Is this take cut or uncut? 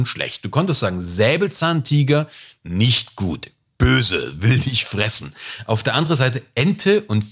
uncut